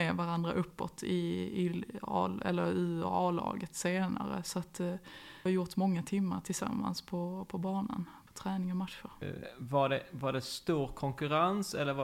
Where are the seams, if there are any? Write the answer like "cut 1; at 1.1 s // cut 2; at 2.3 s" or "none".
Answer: cut 1; at 5.5 s